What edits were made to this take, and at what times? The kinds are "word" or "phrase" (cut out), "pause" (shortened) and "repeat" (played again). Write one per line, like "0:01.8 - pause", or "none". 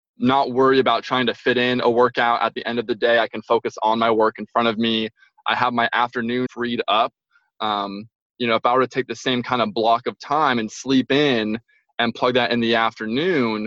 0:06.5 - word